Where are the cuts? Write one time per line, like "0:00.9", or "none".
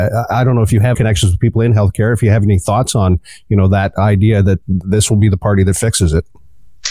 0:00.9
0:04.6